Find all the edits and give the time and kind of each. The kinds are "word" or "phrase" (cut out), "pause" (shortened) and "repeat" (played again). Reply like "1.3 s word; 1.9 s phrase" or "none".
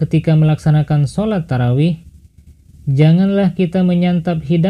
none

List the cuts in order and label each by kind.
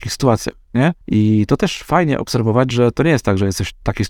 1.0 s pause

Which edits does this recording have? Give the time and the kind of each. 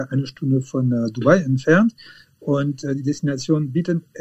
none

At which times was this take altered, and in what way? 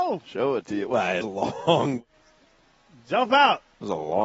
1.2 s word

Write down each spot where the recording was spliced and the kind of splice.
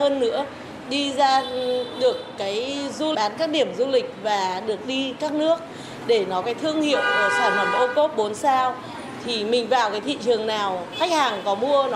3.1 s word; 6.4 s word

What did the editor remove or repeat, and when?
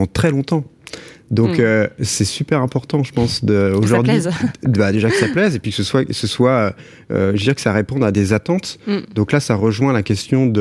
none

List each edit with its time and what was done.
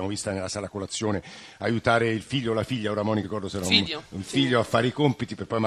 3.2 s word

